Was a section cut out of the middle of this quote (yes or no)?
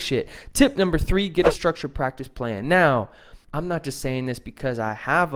yes